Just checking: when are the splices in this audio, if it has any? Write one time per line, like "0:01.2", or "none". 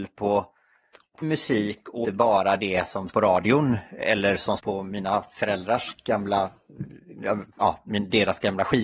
0:01.2
0:02.0
0:03.1
0:04.6